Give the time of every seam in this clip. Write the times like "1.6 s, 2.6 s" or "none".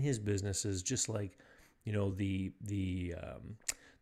none